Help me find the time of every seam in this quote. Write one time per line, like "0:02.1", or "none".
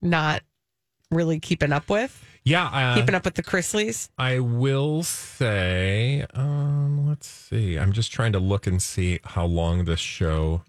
none